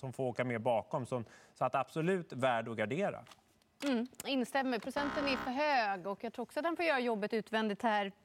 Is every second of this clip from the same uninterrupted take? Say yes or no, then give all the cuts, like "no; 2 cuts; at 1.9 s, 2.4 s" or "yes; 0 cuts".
yes; 0 cuts